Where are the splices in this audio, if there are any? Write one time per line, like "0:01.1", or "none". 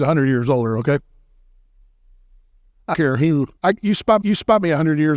0:02.9
0:03.6
0:04.2